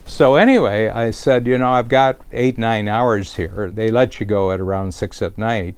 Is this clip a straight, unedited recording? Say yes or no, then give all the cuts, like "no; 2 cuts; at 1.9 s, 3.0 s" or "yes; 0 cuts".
yes; 0 cuts